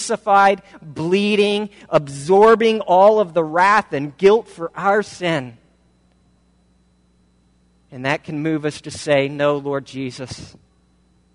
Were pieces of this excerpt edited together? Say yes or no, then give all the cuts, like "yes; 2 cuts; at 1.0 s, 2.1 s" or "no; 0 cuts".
no; 0 cuts